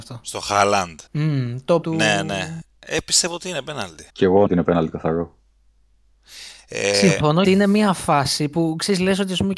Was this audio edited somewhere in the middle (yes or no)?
yes